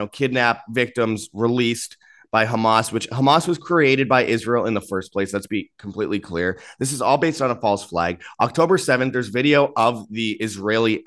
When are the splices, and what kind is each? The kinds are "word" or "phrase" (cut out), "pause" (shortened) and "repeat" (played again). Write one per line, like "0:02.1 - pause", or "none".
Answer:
none

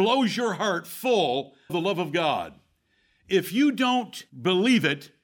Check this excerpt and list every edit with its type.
0:01.7 - word
0:04.3 - pause

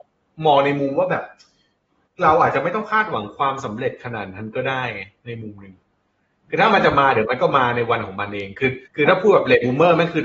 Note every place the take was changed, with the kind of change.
0:08.9 - pause

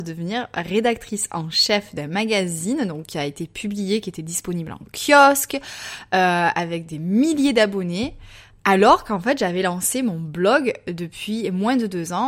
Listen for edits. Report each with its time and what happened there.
none

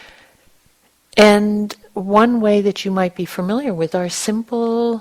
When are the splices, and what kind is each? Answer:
0:03.9 - word

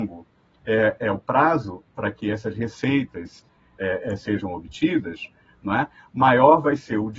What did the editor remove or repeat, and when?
none

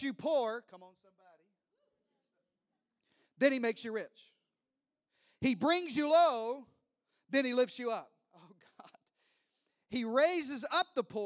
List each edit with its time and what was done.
none

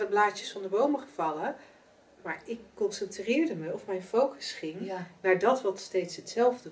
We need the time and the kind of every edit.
none

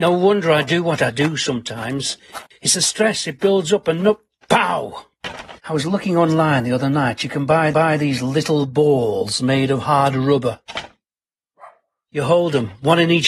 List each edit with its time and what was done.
0:02.5 - pause
0:04.4 - word
0:05.6 - pause
0:07.7 - repeat

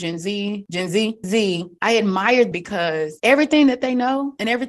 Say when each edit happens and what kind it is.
0:01.2 - word
0:02.5 - word

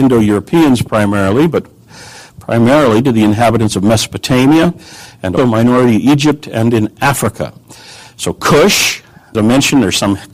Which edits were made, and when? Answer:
0:05.4 - word
0:09.3 - word

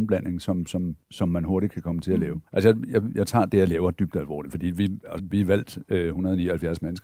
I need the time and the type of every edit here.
0:01.0 - pause
0:02.5 - pause
0:03.1 - word
0:05.2 - word

